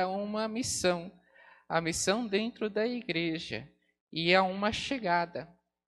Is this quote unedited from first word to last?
yes; 0 cuts

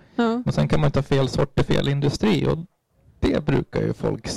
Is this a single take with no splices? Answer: yes; 0 cuts

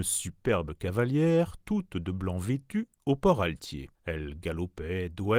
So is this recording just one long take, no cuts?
no; 1 cut; at 3.9 s

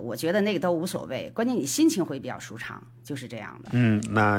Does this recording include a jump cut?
no; 0 cuts

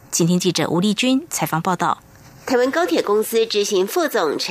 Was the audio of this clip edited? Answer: no; 0 cuts

